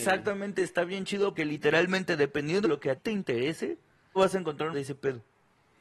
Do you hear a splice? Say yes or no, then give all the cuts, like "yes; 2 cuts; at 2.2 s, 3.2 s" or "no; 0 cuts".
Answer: yes; 5 cuts; at 1.4 s, 2.6 s, 3.0 s, 4.2 s, 4.7 s